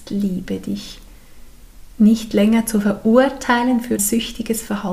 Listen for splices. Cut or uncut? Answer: cut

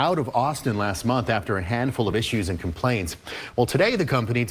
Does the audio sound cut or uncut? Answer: uncut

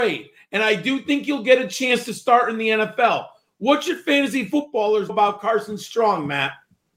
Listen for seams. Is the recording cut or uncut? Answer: cut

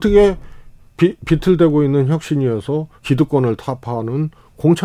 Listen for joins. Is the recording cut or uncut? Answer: cut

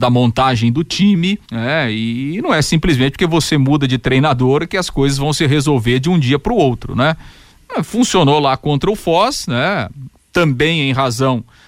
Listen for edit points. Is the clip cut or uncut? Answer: cut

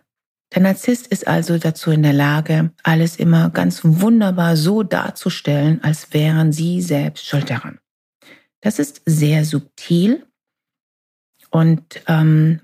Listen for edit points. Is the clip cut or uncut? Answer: cut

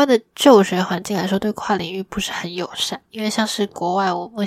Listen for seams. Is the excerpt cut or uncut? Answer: uncut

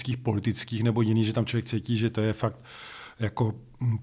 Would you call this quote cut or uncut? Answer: uncut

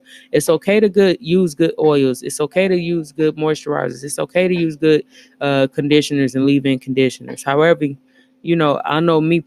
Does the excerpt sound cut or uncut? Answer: uncut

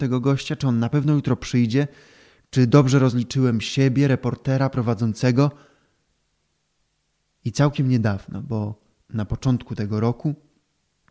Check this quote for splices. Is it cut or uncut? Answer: uncut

